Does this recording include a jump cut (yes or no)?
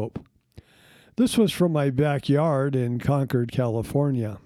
no